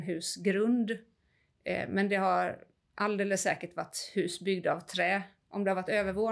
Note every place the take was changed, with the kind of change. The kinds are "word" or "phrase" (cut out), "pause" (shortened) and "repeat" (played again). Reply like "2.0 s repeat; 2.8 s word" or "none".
none